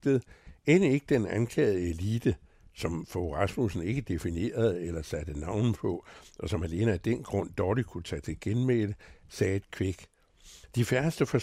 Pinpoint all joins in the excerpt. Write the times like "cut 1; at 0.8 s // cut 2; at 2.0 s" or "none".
none